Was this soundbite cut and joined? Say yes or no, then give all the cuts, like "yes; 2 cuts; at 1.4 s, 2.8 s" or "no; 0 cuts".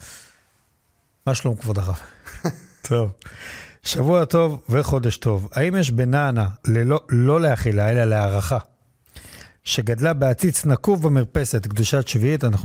yes; 1 cut; at 6.6 s